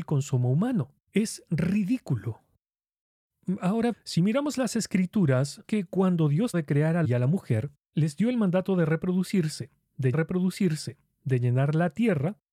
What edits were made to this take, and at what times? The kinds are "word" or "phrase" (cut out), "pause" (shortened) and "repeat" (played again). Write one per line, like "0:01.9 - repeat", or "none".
0:01.0 - pause
0:03.9 - word
0:05.6 - word
0:06.5 - word
0:07.0 - word
0:10.1 - repeat